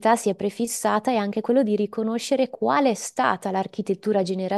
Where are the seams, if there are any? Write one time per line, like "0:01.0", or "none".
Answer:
none